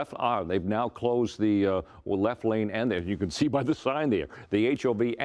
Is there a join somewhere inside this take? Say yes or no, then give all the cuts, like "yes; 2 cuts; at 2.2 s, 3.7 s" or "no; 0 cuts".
no; 0 cuts